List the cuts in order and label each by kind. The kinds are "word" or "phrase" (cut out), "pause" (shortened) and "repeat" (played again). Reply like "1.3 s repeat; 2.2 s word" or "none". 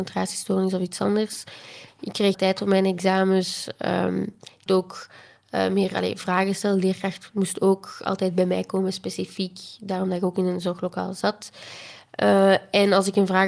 2.3 s word; 4.7 s word